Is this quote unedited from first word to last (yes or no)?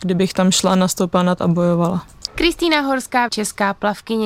no